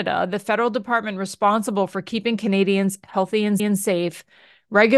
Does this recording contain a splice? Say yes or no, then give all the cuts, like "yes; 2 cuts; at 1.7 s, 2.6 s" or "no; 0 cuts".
yes; 1 cut; at 3.6 s